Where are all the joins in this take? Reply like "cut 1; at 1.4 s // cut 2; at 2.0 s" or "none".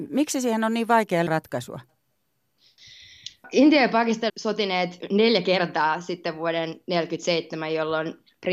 cut 1; at 1.3 s // cut 2; at 4.3 s